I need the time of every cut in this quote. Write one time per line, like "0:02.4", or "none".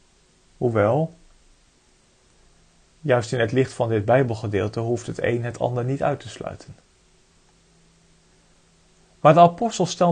none